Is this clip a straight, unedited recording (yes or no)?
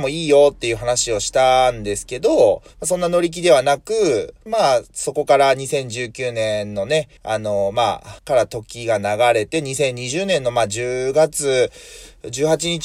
no